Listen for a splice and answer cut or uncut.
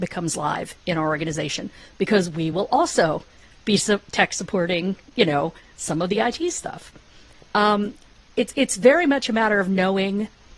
uncut